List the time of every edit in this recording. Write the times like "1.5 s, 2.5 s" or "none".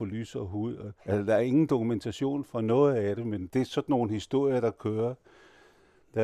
1.0 s